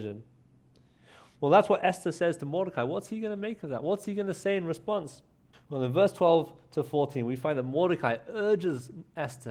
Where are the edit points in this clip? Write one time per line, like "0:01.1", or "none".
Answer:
0:05.5